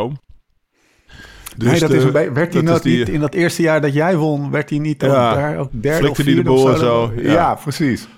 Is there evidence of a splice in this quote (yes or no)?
no